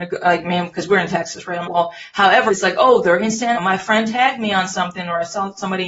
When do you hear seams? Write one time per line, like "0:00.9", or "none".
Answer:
0:01.6
0:02.5
0:03.5